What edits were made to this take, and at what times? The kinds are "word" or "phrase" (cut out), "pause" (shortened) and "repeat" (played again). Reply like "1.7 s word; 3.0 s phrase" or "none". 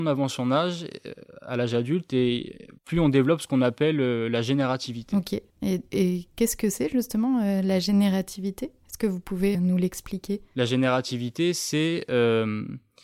2.8 s pause; 5.5 s pause; 9.5 s word